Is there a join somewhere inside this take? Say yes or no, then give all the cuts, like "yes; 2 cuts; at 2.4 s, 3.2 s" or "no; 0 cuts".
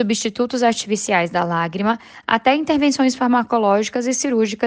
no; 0 cuts